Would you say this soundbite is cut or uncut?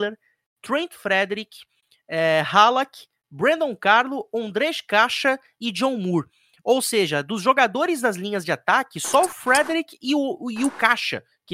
uncut